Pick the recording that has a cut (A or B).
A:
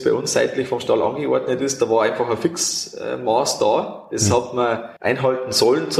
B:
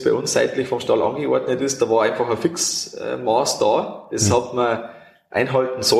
A